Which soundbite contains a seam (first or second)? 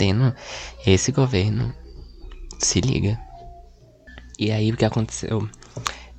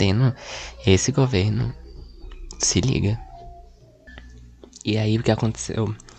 first